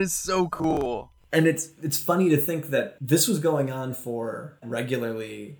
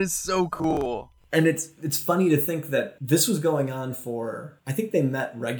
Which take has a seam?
first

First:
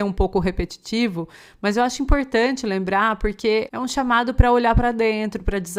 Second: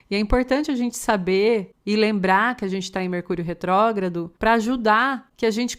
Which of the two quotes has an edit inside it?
second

